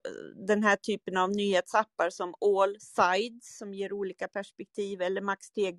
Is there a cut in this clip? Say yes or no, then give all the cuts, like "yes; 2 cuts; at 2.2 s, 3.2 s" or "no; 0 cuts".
no; 0 cuts